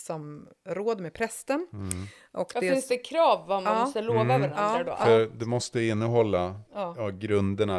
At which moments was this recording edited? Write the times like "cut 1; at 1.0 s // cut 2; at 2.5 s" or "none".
cut 1; at 6.7 s